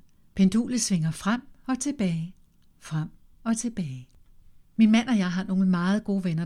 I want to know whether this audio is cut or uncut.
uncut